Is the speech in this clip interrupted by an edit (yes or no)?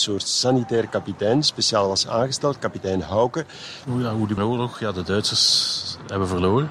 yes